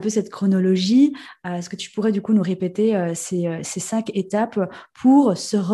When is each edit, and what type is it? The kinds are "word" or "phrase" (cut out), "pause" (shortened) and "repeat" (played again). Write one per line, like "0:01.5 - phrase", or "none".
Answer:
none